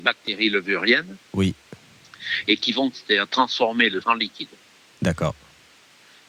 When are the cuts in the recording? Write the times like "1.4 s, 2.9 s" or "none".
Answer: 2.9 s, 4.0 s